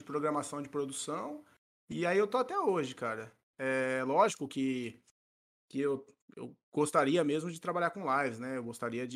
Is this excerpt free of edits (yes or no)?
yes